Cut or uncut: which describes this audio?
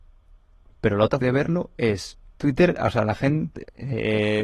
cut